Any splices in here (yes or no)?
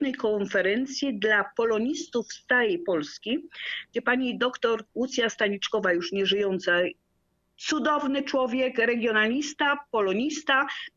no